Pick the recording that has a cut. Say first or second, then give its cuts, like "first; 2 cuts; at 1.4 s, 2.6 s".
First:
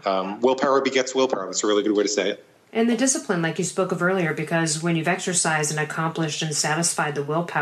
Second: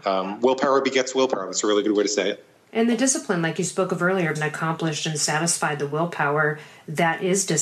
second; 1 cut; at 4.3 s